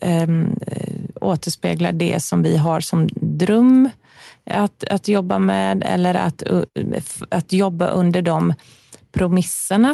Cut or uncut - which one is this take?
uncut